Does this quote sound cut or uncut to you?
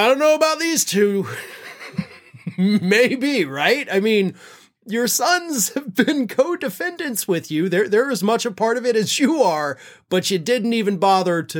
uncut